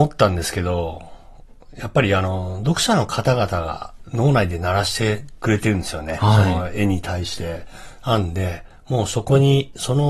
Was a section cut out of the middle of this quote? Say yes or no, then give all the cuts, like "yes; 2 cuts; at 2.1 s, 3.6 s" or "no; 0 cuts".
no; 0 cuts